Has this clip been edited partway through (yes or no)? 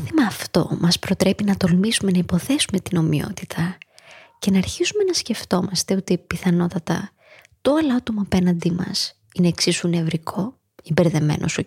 no